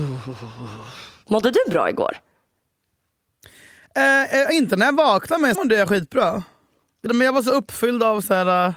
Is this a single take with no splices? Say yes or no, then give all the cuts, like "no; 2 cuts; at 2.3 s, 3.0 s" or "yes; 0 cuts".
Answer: no; 2 cuts; at 5.5 s, 7.1 s